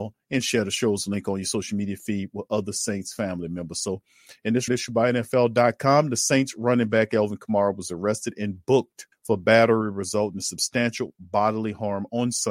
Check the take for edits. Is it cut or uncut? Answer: cut